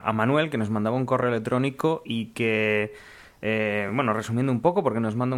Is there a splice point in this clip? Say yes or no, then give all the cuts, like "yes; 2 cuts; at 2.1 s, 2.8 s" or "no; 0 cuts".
no; 0 cuts